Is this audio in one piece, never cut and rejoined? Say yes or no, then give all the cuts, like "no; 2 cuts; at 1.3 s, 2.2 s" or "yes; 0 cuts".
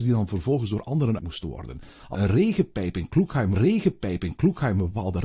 no; 3 cuts; at 1.2 s, 2.1 s, 3.5 s